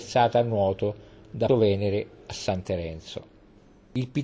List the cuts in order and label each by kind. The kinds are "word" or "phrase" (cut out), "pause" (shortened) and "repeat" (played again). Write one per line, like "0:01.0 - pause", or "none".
0:01.5 - word